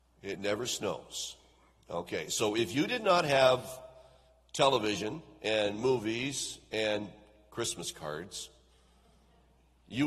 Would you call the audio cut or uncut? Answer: uncut